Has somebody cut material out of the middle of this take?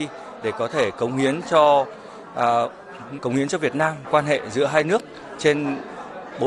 yes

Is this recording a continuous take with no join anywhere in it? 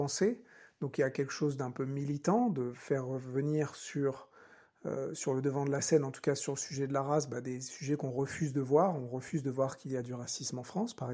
yes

